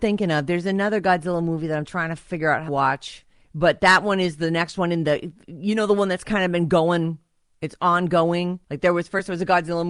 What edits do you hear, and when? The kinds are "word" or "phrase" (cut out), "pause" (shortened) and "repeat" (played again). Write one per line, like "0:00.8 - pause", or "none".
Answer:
0:02.7 - word
0:08.6 - pause